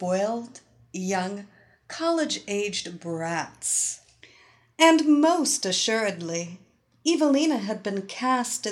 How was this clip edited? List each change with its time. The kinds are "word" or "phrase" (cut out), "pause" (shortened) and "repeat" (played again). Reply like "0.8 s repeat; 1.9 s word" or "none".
none